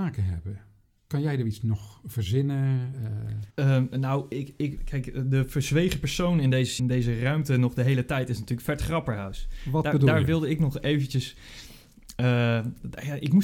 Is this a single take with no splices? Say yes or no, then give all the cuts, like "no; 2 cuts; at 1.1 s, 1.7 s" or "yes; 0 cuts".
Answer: no; 3 cuts; at 3.5 s, 4.8 s, 6.8 s